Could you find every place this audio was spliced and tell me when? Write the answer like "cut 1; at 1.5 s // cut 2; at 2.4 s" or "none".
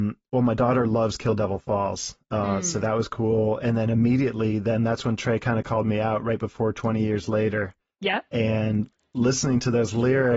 none